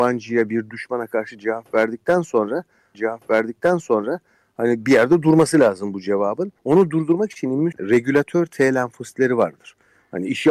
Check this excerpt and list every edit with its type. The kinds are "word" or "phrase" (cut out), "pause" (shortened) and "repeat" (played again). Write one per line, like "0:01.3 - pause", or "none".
0:02.9 - repeat
0:06.6 - pause
0:07.7 - word